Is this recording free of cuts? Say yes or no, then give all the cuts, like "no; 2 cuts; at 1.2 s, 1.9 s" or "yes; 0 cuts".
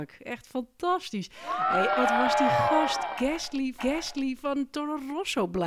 no; 2 cuts; at 2.0 s, 3.8 s